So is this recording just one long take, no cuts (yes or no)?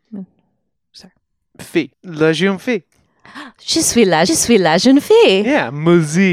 no